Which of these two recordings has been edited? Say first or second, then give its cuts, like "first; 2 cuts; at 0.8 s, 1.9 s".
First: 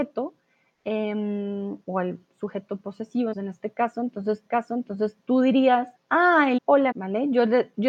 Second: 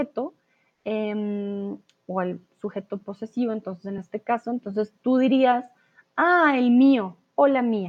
first; 6 cuts; at 1.8 s, 3.3 s, 4.5 s, 5.9 s, 6.6 s, 6.9 s